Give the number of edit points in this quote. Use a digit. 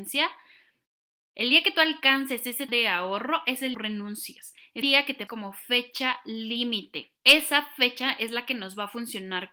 5